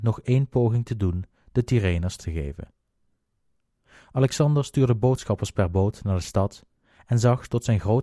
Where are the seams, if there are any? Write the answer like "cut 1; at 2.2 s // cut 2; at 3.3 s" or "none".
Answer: cut 1; at 2.2 s